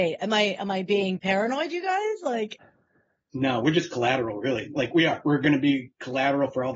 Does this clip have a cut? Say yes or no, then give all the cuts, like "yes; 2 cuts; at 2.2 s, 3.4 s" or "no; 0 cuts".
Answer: no; 0 cuts